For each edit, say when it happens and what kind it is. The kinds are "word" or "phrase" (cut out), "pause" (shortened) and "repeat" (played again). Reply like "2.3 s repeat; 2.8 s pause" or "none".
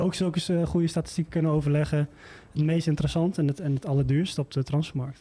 none